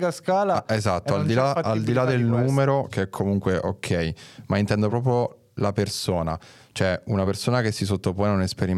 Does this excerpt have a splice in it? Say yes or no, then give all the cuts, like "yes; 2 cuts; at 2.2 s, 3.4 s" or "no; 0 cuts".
no; 0 cuts